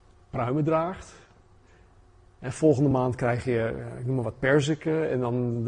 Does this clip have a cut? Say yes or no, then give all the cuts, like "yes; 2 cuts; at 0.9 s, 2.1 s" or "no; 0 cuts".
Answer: no; 0 cuts